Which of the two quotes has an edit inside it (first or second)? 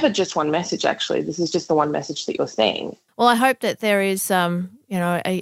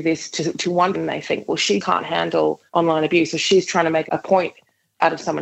second